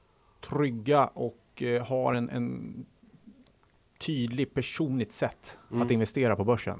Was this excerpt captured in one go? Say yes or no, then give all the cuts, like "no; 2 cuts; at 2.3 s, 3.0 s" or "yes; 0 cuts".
yes; 0 cuts